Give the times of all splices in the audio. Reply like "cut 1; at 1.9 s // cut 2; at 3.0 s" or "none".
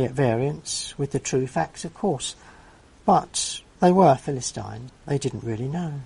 cut 1; at 3.7 s // cut 2; at 4.9 s